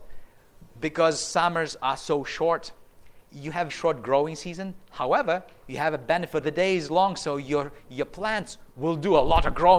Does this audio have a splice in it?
yes; 3 cuts; at 3.2 s, 3.7 s, 6.4 s

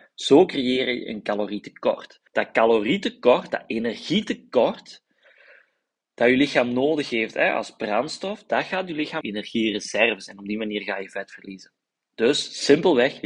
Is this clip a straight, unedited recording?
no; 2 cuts; at 2.3 s, 9.2 s

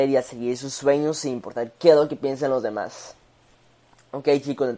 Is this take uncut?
yes; 0 cuts

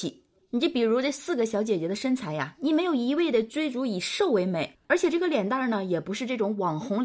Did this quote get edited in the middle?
yes; 1 cut; at 4.8 s

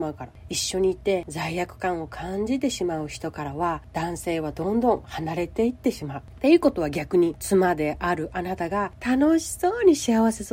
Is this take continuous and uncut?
yes; 0 cuts

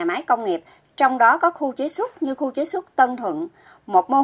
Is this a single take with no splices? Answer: yes; 0 cuts

